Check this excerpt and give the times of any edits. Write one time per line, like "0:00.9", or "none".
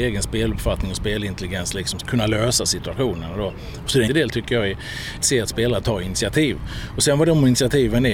0:02.0
0:04.1
0:05.2